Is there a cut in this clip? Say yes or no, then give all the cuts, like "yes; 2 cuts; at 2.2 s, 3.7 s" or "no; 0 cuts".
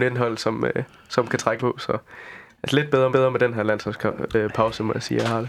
yes; 2 cuts; at 1.6 s, 3.1 s